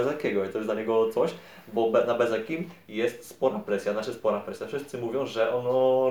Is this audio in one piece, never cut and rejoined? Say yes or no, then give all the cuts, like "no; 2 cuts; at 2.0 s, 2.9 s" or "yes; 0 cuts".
yes; 0 cuts